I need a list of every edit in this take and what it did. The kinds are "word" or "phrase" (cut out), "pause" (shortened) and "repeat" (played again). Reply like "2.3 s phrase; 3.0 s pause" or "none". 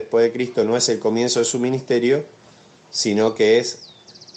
none